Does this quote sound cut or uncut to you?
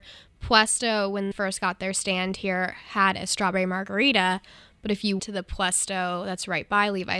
cut